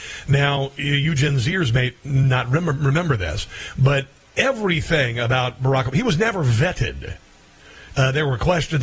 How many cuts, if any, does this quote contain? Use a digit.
0